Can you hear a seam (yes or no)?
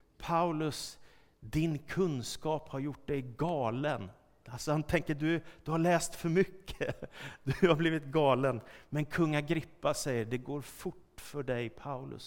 no